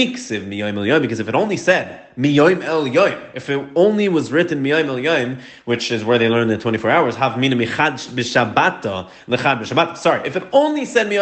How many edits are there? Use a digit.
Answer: 0